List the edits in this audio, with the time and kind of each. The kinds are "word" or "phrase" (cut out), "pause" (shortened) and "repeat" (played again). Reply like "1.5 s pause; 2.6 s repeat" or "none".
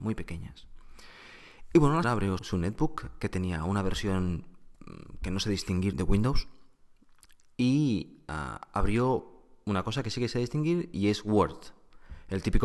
2.0 s word; 2.4 s word; 5.9 s word